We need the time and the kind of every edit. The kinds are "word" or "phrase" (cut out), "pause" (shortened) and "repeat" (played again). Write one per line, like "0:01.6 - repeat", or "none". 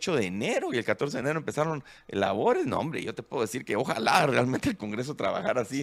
none

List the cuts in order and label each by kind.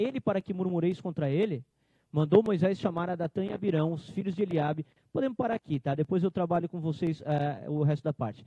none

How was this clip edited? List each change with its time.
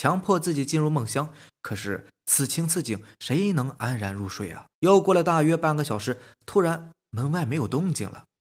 0:04.7 - pause

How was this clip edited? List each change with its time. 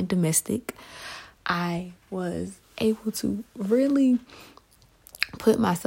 0:01.3 - pause

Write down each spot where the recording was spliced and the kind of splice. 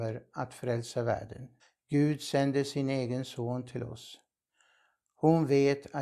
0:01.6 - pause

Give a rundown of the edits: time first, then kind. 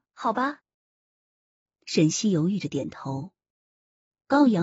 none

